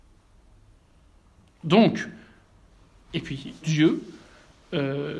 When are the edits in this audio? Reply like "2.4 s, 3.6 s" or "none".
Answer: 3.6 s